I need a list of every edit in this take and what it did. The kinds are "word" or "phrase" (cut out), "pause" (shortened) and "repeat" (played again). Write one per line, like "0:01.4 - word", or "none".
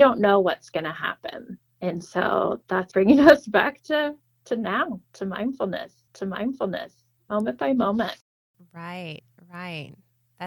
0:01.7 - pause
0:02.9 - word
0:06.1 - repeat